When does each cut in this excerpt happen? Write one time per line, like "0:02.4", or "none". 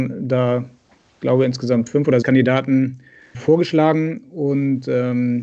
0:02.2
0:03.3

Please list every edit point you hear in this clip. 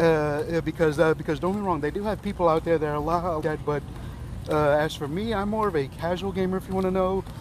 0:03.4

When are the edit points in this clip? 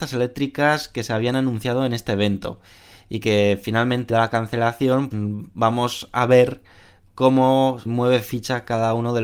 0:04.1
0:05.1
0:07.9

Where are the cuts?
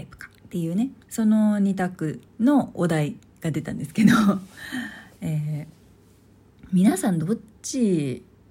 0:01.0
0:02.3

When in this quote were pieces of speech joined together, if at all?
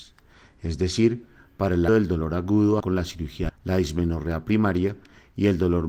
0:01.9
0:02.8
0:03.5

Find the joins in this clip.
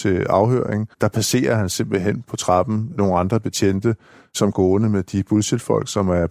0:00.9
0:04.5

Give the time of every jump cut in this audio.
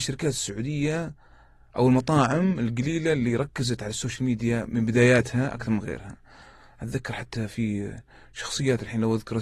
none

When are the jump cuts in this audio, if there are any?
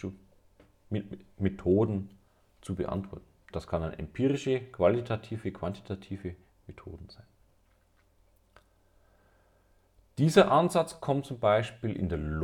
none

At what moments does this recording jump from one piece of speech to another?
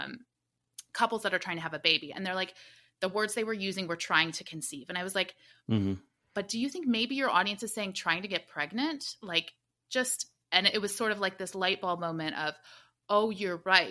none

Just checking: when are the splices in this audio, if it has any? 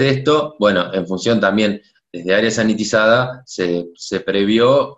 none

